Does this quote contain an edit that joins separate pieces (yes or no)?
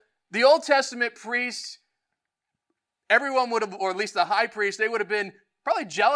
no